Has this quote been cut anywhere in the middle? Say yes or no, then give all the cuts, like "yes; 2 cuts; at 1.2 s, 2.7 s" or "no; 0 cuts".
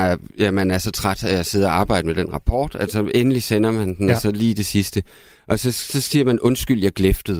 no; 0 cuts